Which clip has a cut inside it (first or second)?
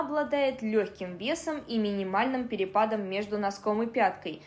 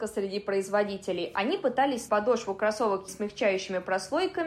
second